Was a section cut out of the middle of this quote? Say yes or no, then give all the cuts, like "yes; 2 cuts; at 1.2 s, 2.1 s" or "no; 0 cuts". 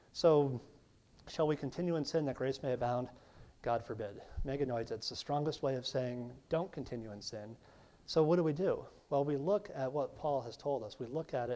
no; 0 cuts